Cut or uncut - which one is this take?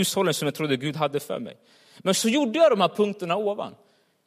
uncut